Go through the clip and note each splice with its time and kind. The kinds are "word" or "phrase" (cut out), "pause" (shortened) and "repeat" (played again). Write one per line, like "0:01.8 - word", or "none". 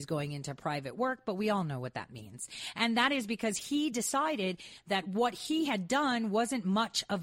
none

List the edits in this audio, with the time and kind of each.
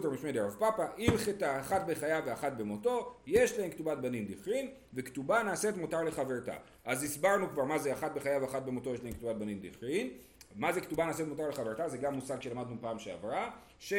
none

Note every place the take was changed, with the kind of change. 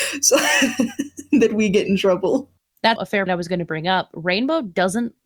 0:03.0 - word
0:03.3 - word

